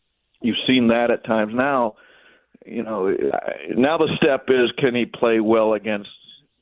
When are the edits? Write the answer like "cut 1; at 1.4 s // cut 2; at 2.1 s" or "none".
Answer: none